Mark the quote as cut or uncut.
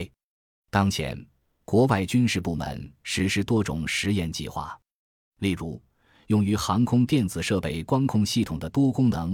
uncut